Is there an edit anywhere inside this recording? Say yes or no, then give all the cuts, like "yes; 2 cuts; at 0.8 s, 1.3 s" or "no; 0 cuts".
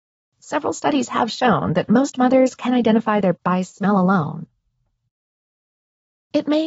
yes; 1 cut; at 3.3 s